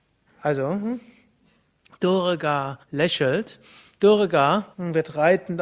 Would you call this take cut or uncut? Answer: cut